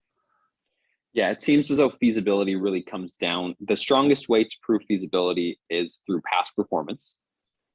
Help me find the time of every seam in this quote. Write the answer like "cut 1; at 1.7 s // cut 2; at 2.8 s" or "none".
none